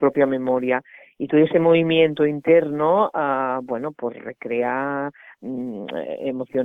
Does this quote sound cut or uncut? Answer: uncut